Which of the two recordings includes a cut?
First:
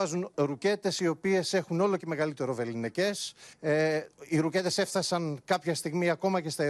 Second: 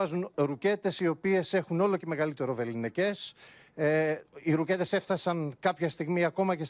first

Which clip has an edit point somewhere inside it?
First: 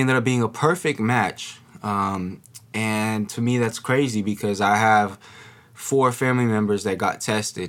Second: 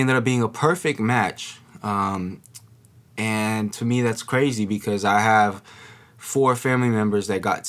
first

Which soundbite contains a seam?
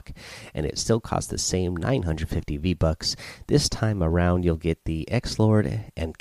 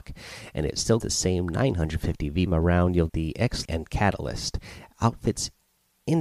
second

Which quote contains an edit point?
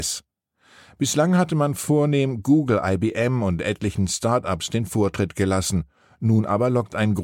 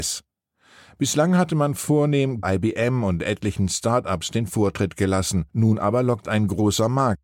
second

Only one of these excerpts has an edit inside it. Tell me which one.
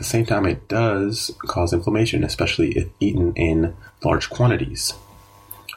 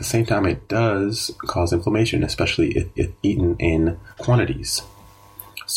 second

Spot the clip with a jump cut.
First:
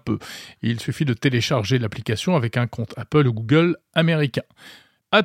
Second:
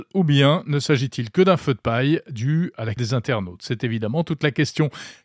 second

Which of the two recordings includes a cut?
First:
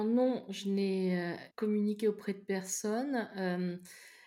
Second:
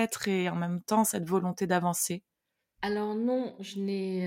first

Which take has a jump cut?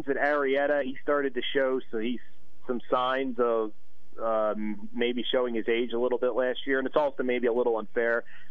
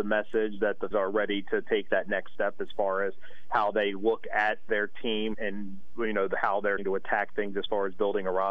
second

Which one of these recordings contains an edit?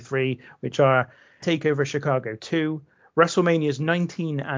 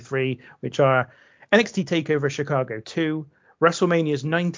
first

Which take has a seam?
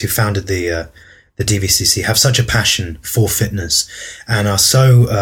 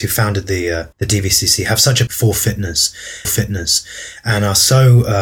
second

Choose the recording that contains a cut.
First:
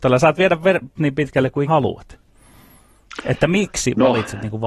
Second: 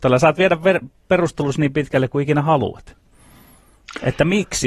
first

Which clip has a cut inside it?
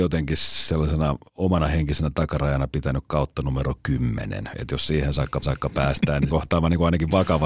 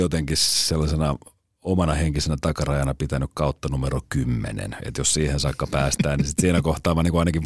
first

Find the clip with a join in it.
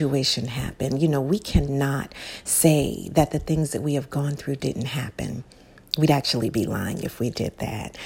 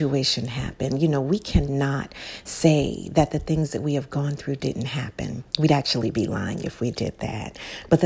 second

